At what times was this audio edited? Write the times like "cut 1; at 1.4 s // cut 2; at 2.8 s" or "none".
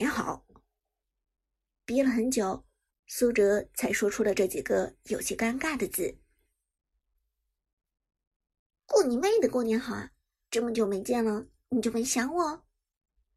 none

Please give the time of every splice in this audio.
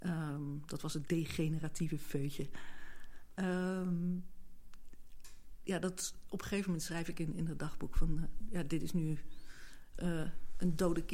none

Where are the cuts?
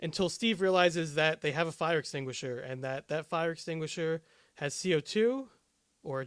none

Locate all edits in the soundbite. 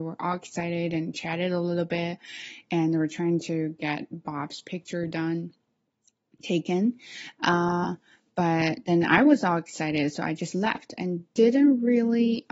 none

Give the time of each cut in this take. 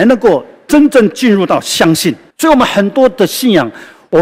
cut 1; at 2.3 s

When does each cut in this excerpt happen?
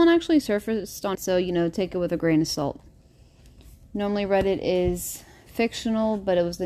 cut 1; at 1.1 s

